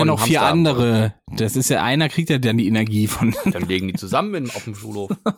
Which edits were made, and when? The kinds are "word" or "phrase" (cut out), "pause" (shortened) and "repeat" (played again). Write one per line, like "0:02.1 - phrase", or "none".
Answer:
0:01.2 - pause